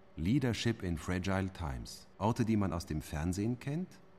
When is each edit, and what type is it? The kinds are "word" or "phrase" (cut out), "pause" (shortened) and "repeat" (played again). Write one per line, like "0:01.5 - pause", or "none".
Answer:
0:02.1 - pause